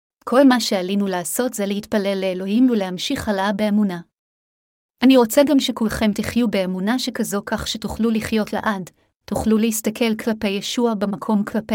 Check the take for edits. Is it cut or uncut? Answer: uncut